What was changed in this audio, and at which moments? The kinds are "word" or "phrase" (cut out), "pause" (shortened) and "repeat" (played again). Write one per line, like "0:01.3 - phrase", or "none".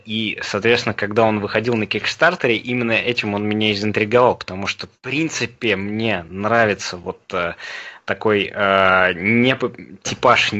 0:05.0 - pause